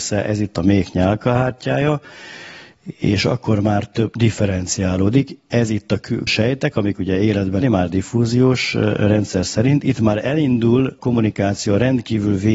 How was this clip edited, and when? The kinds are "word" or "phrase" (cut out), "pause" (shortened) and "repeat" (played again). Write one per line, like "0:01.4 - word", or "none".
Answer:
0:06.3 - word
0:07.6 - phrase
0:11.0 - word